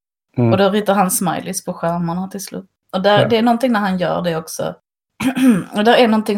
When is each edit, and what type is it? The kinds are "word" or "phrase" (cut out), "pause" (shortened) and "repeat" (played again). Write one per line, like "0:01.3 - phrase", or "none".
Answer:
none